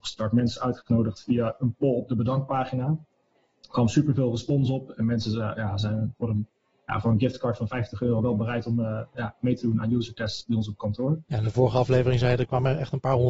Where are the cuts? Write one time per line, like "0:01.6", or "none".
none